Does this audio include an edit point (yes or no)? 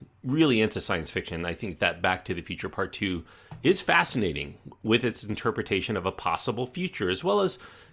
no